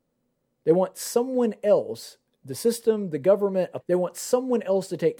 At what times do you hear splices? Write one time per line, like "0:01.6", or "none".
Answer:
0:03.8